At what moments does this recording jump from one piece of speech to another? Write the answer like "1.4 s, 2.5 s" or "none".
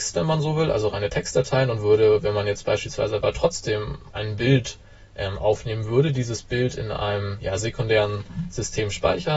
none